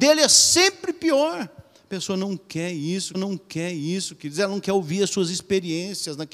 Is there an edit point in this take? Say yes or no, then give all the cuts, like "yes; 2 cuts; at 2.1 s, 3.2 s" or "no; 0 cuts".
yes; 1 cut; at 3.1 s